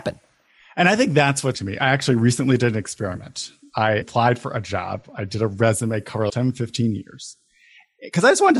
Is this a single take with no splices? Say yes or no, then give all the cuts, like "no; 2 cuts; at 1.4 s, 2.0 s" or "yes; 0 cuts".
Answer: no; 3 cuts; at 1.5 s, 4.0 s, 6.3 s